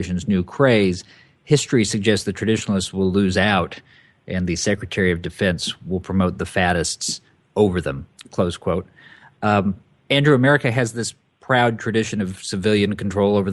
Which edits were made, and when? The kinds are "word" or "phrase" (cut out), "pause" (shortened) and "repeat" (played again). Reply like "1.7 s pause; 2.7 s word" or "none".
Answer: none